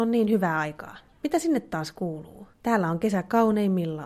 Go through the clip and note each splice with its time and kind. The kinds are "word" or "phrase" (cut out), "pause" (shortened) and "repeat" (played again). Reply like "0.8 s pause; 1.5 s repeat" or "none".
1.1 s pause; 2.5 s pause